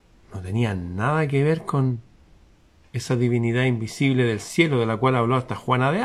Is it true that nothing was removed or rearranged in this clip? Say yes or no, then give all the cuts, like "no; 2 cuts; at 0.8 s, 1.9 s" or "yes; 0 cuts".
yes; 0 cuts